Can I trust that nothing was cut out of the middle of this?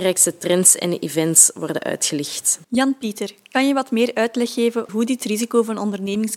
no; 2 cuts; at 2.6 s, 4.9 s

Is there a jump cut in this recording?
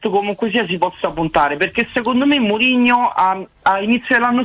no; 0 cuts

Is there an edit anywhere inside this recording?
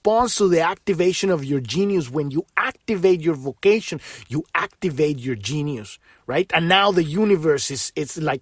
no; 0 cuts

